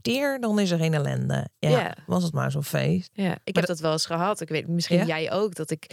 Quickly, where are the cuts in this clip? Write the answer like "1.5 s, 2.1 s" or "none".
none